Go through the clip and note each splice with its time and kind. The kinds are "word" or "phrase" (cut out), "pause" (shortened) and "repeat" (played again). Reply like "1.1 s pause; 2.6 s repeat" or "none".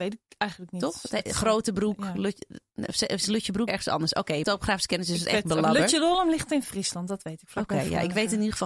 3.7 s word; 4.4 s word